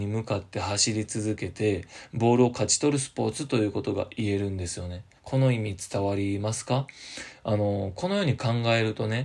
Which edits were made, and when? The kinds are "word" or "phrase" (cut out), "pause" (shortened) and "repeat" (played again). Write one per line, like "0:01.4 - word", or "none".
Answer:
0:05.2 - pause

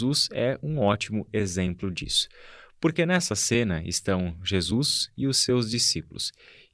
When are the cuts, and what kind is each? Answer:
none

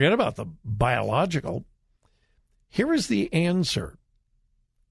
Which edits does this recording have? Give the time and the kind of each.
none

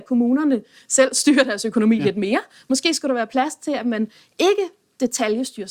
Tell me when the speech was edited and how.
none

